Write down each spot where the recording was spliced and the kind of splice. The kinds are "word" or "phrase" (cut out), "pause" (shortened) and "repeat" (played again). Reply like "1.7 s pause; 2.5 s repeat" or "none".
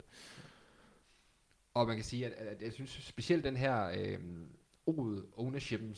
none